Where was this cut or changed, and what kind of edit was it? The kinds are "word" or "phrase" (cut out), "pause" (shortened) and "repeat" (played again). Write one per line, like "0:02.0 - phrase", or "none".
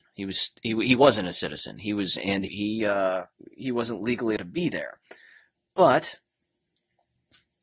0:02.2 - phrase
0:02.5 - word
0:04.4 - word